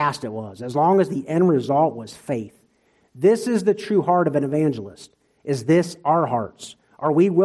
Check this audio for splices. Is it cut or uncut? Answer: uncut